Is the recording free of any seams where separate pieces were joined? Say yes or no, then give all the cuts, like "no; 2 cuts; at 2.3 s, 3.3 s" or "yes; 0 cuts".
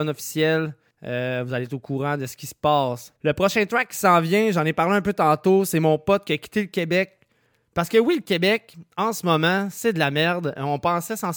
no; 2 cuts; at 0.9 s, 3.2 s